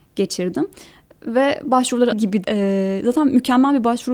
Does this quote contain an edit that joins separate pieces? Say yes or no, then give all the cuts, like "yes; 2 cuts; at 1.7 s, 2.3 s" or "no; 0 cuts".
yes; 2 cuts; at 2.1 s, 2.4 s